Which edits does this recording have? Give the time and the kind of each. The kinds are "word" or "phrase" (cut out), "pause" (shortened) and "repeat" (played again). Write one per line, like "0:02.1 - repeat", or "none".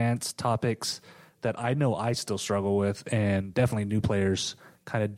none